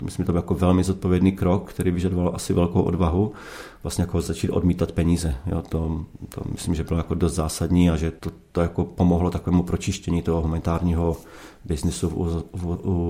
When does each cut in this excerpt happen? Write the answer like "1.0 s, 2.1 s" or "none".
8.2 s